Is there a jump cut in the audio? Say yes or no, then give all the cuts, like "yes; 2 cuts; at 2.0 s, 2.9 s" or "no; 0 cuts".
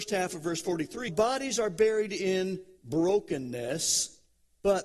yes; 1 cut; at 1.1 s